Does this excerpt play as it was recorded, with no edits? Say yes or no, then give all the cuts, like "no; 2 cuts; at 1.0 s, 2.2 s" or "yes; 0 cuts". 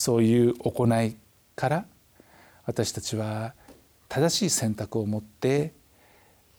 yes; 0 cuts